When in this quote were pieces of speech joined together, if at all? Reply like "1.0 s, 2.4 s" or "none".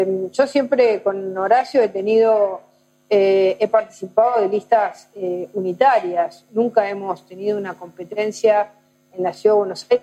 none